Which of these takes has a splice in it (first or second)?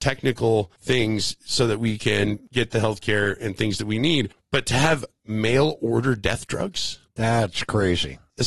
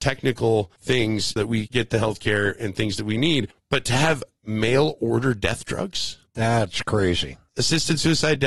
second